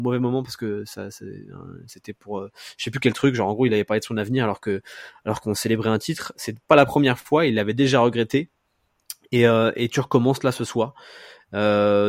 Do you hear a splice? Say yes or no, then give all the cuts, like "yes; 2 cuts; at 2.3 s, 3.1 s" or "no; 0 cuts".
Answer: no; 0 cuts